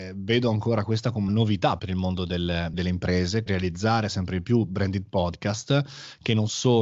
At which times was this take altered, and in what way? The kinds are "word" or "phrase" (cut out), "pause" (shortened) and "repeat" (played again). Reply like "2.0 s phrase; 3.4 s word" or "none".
1.3 s word; 1.8 s word; 2.7 s word; 3.5 s word

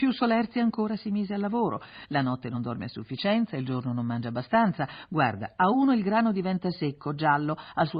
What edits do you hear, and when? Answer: none

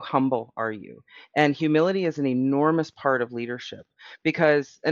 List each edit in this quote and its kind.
none

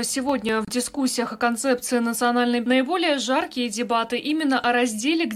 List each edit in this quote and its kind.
2.6 s word

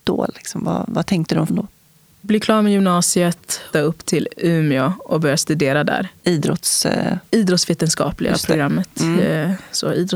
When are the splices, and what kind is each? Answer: 1.5 s word; 3.7 s phrase; 6.2 s pause

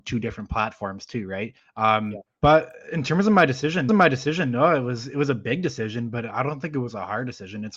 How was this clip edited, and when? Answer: 1.6 s pause; 2.3 s pause; 3.9 s repeat

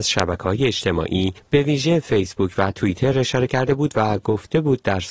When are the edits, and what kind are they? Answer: none

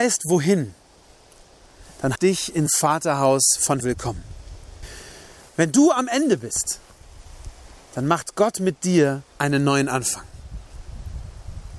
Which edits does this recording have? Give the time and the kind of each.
2.2 s phrase; 2.7 s word; 3.8 s word; 9.3 s pause

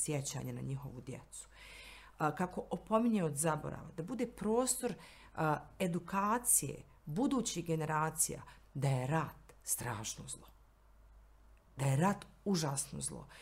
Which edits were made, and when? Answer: none

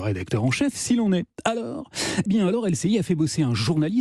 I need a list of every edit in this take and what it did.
2.3 s word

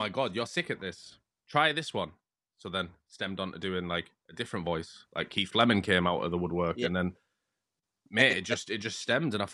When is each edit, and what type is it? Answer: none

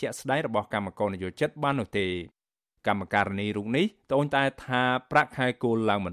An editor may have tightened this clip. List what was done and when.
none

